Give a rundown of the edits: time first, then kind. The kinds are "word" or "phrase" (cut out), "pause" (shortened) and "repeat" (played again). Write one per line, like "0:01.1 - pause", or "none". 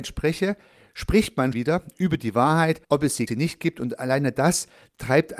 0:01.5 - word
0:02.8 - pause
0:03.3 - phrase